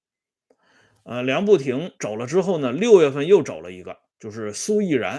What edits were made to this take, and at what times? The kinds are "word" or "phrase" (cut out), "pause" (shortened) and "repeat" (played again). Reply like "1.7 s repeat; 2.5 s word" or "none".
2.0 s pause; 4.1 s pause

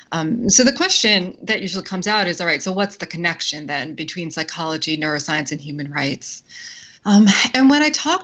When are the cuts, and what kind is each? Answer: 7.0 s pause

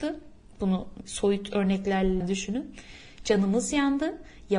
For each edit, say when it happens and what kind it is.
1.0 s word; 2.2 s word

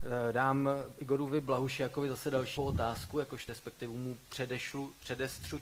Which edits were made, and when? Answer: 2.6 s word; 3.5 s word

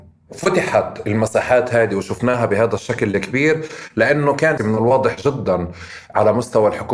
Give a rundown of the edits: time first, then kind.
4.6 s phrase

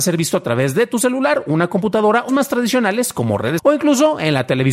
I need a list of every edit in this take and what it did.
2.3 s word; 3.6 s word

